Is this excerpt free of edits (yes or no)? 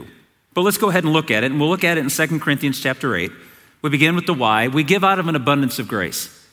yes